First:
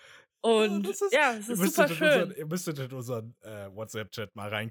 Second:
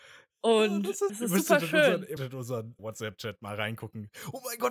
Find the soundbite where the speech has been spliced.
second; 3 cuts; at 1.1 s, 2.2 s, 2.8 s

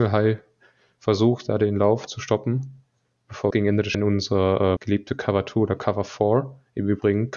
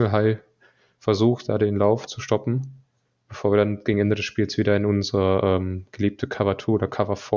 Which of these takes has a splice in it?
first; 3 cuts; at 3.5 s, 3.9 s, 4.8 s

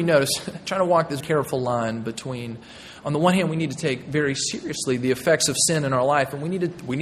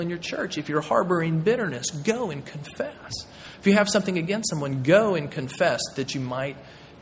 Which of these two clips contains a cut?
first; 1 cut; at 1.2 s

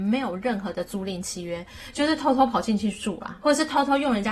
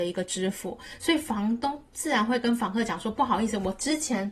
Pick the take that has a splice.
first; 1 cut; at 3.4 s

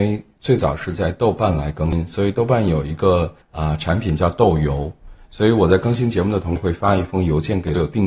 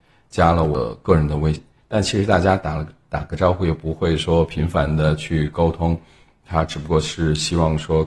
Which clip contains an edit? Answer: first; 1 cut; at 3.4 s

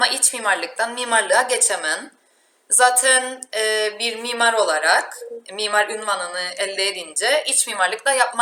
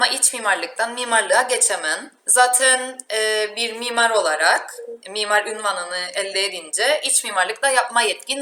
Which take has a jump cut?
second; 1 cut; at 2.2 s

